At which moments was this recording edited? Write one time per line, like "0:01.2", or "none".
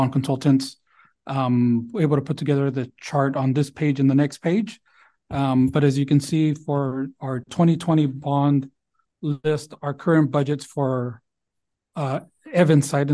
none